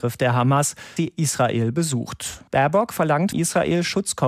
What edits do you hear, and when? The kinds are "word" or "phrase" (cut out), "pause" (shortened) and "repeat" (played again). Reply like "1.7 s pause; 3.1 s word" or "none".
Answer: 1.0 s word; 3.3 s word

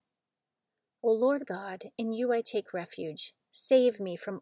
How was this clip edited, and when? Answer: 1.4 s word

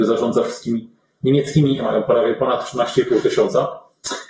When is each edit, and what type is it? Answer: 1.8 s word

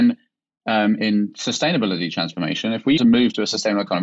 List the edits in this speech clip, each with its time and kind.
1.0 s word; 3.0 s word

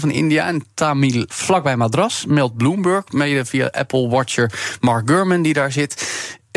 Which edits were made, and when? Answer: 1.3 s word

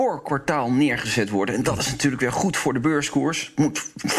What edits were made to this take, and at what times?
none

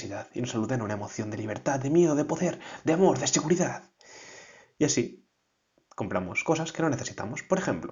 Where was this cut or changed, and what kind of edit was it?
none

